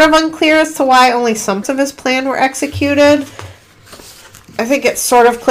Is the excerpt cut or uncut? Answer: cut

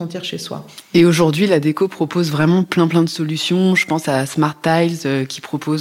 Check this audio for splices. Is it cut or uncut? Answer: uncut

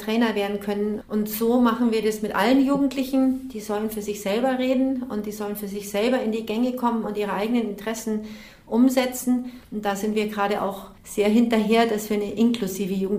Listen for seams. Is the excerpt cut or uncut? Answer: cut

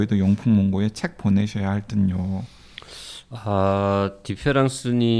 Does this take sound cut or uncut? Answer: uncut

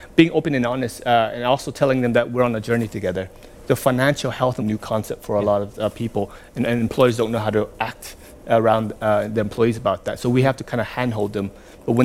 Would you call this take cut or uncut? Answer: cut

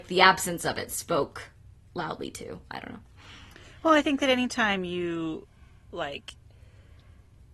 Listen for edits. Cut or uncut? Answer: uncut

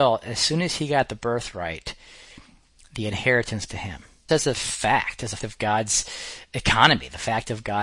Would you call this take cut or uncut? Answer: cut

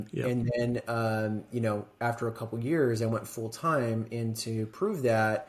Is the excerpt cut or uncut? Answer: uncut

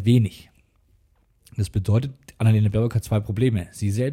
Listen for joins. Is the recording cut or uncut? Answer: uncut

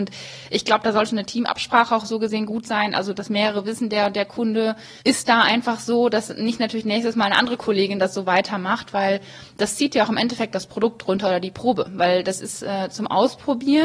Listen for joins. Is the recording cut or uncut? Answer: cut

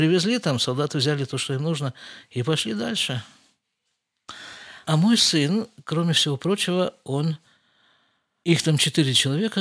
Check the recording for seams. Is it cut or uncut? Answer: uncut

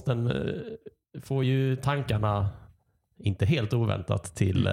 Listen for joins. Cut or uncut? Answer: uncut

